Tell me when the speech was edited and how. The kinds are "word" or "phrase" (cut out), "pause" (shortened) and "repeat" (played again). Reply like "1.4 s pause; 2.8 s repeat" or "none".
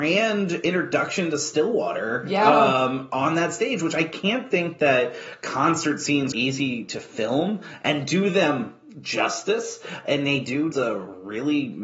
6.3 s word; 10.7 s word